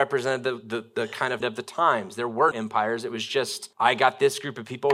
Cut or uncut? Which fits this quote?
cut